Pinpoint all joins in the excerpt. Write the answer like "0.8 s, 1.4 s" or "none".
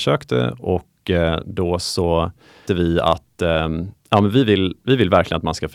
2.7 s